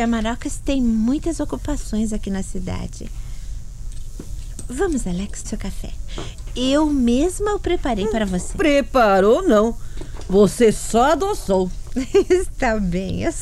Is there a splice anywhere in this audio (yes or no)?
yes